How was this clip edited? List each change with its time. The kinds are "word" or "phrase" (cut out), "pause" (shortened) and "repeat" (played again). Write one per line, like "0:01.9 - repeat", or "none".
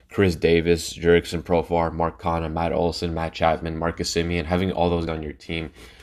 0:05.1 - word

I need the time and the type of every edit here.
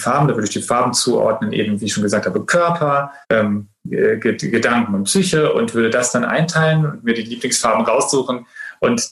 0:03.2 - pause

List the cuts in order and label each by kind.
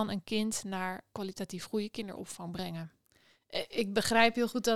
0:01.1 - word

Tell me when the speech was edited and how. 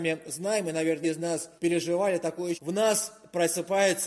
0:01.0 - word
0:01.6 - pause
0:02.5 - word

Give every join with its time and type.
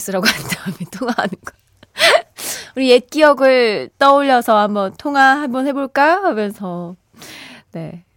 none

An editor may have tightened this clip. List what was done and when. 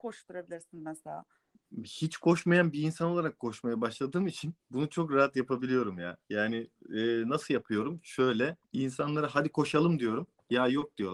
0:04.6 - pause

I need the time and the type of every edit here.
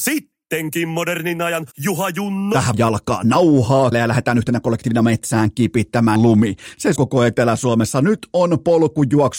0:01.7 - pause
0:02.7 - phrase
0:03.9 - word
0:06.2 - word
0:07.0 - word

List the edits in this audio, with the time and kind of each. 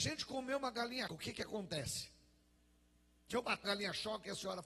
0:01.1 - word
0:03.6 - word

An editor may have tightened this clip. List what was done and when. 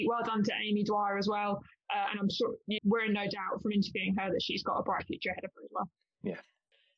0:02.8 - word

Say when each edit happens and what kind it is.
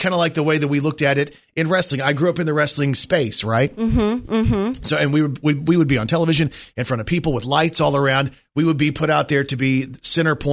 none

